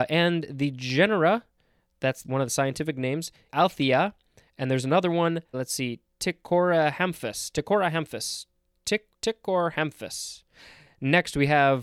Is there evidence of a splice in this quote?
yes; 4 cuts; at 2.2 s, 3.5 s, 5.5 s, 9.1 s

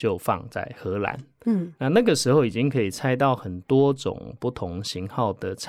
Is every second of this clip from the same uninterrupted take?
yes; 0 cuts

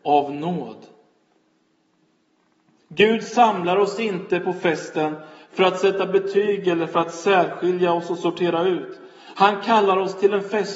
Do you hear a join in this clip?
no; 0 cuts

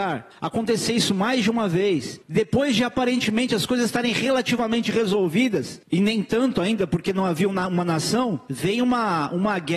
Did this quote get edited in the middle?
yes; 1 cut; at 8.4 s

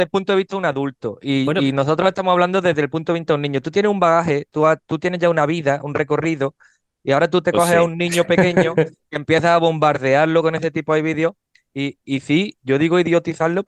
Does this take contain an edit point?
no; 0 cuts

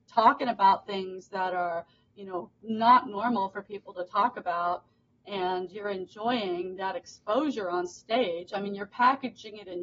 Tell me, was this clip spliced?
no; 0 cuts

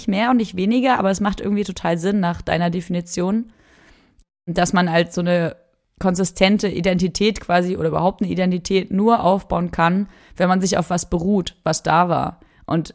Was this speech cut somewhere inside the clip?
no; 0 cuts

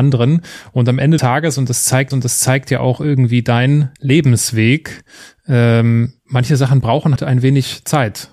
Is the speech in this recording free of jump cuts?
no; 5 cuts; at 1.2 s, 2.1 s, 4.0 s, 6.2 s, 7.2 s

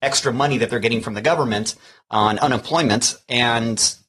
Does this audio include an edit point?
no; 0 cuts

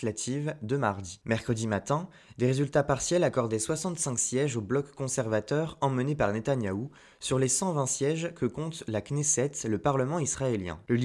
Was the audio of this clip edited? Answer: no; 0 cuts

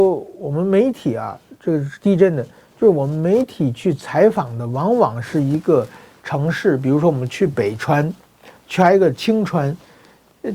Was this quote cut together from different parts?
no; 0 cuts

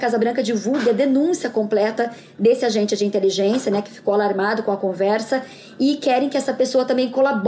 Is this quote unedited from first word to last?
yes; 0 cuts

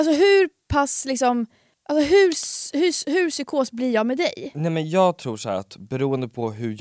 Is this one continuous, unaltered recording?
yes; 0 cuts

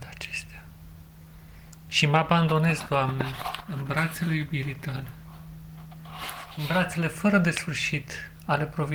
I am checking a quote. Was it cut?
no; 0 cuts

